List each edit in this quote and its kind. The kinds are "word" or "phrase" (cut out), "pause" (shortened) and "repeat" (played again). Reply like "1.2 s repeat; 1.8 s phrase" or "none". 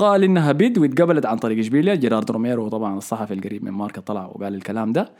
none